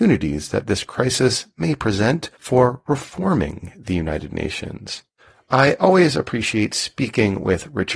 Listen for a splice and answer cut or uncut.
cut